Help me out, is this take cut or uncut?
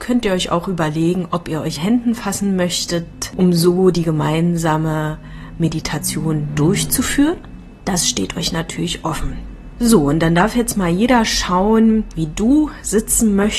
cut